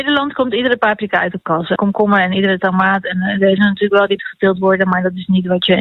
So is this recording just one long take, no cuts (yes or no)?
no